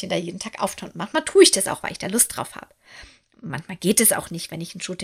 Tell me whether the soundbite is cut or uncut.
uncut